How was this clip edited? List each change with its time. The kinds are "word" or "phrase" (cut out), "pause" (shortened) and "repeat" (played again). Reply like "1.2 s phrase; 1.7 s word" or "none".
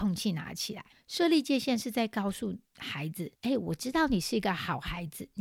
0.9 s pause; 2.7 s pause; 3.4 s pause